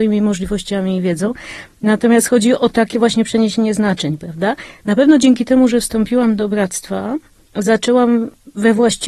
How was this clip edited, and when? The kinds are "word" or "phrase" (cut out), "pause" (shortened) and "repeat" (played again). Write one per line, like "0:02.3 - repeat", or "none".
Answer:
none